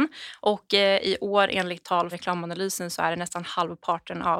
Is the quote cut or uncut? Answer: cut